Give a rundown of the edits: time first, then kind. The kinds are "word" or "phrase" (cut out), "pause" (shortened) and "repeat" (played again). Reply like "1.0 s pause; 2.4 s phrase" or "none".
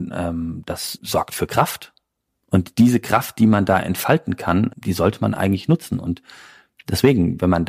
none